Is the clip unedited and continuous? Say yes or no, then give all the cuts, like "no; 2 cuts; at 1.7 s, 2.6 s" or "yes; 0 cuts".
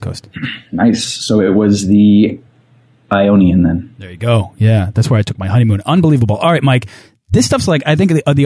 yes; 0 cuts